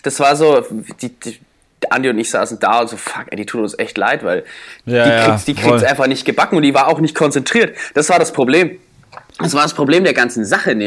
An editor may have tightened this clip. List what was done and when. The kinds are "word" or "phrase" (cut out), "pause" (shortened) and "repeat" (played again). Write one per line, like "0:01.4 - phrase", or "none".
0:04.8 - pause